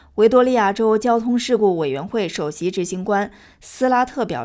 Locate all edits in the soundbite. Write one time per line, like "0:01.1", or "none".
none